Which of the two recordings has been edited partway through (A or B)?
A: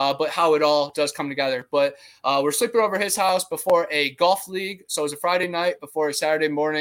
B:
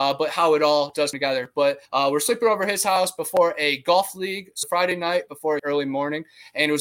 B